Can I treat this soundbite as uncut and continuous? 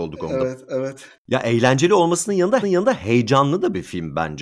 no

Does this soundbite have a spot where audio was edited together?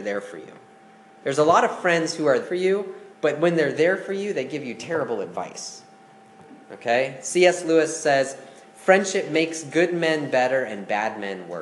yes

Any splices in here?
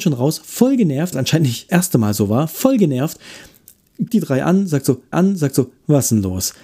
yes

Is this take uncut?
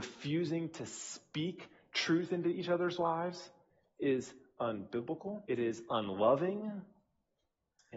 no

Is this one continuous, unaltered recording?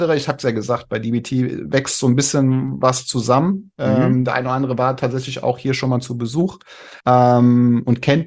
no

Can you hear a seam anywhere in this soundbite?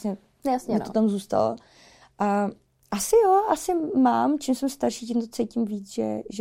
no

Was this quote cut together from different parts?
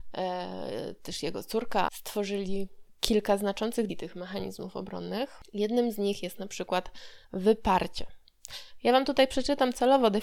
yes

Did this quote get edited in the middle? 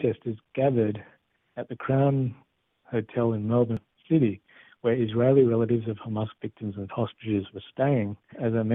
no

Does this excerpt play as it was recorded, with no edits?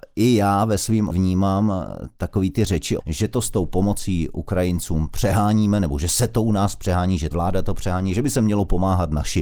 no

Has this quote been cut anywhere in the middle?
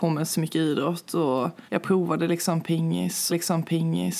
yes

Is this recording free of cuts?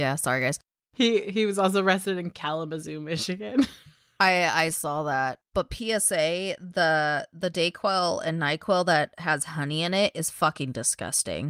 no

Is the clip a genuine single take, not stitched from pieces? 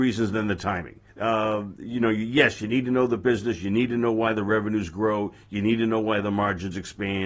no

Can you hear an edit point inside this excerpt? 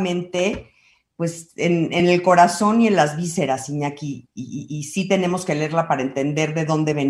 no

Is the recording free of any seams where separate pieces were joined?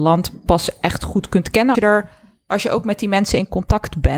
no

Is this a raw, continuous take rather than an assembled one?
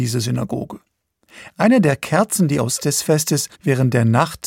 no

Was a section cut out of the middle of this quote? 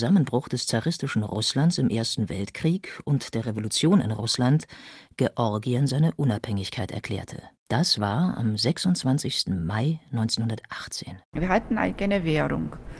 yes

